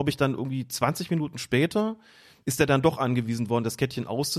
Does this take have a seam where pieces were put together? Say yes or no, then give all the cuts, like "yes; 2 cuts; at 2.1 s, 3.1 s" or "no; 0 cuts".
no; 0 cuts